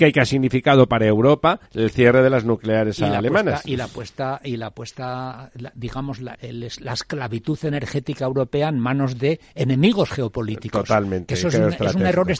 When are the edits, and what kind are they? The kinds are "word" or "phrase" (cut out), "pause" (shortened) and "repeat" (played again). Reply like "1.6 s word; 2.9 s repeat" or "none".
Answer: 1.7 s pause; 6.3 s word